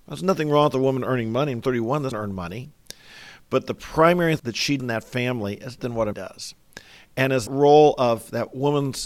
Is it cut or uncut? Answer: cut